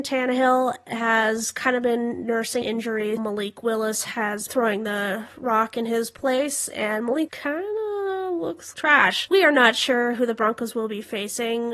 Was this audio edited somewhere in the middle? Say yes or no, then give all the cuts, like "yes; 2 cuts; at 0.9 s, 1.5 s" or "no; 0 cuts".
yes; 6 cuts; at 2.6 s, 3.2 s, 4.5 s, 7.3 s, 8.7 s, 9.3 s